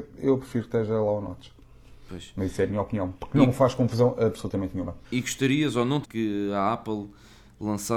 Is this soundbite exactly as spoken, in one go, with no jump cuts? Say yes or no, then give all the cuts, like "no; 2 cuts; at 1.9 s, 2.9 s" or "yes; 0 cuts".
no; 2 cuts; at 5.0 s, 6.0 s